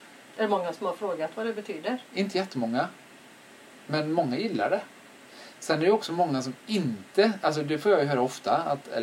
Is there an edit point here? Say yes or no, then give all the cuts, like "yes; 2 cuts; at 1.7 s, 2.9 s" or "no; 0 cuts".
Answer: no; 0 cuts